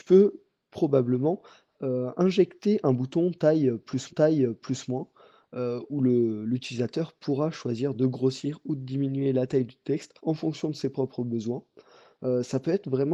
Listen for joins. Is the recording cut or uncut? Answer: cut